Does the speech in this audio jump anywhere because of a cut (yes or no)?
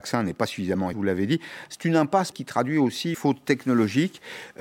yes